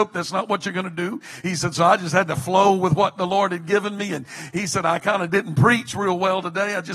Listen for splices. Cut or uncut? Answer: uncut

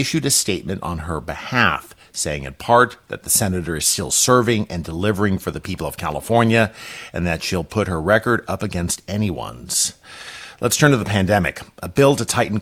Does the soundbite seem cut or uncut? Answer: uncut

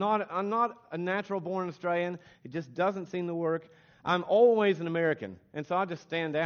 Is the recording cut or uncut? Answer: uncut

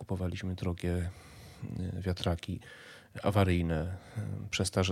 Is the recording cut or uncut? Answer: uncut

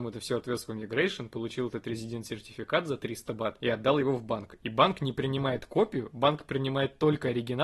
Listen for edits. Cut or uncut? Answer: uncut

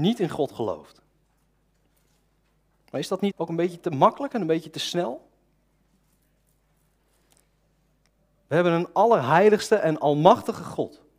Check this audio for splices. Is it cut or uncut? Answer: cut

